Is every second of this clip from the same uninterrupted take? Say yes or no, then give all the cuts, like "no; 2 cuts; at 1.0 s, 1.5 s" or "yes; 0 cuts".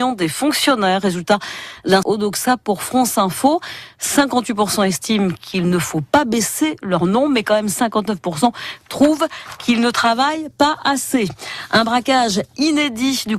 no; 1 cut; at 2.0 s